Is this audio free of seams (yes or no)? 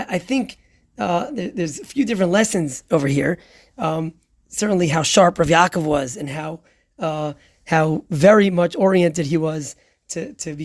yes